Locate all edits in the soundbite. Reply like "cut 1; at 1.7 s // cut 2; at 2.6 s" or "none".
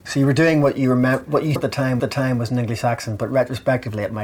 cut 1; at 1.6 s // cut 2; at 2.0 s